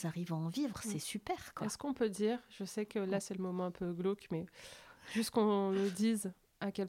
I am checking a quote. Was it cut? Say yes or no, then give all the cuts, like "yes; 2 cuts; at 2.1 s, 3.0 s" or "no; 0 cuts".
no; 0 cuts